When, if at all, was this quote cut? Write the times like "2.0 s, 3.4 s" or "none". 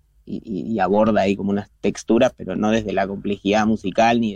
none